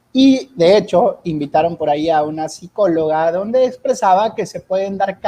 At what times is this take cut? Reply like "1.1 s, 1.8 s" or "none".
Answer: none